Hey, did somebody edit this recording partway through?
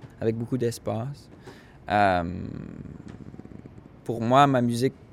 no; 0 cuts

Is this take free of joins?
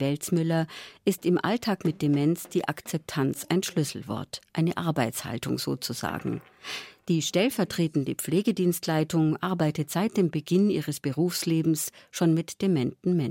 yes; 0 cuts

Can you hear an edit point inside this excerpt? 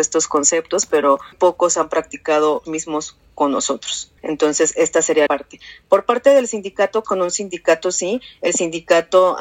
yes; 5 cuts; at 1.3 s, 2.6 s, 4.2 s, 5.3 s, 7.0 s

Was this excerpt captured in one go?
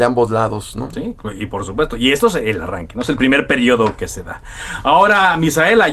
yes; 0 cuts

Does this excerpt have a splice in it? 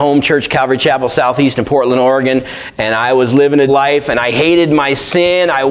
yes; 1 cut; at 3.7 s

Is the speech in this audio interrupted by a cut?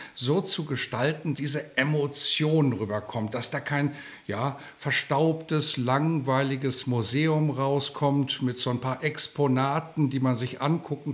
yes; 1 cut; at 1.3 s

